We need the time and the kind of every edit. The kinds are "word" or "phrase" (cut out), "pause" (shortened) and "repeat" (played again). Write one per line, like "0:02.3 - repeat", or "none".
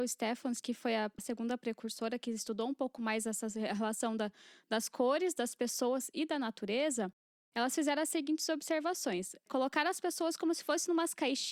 none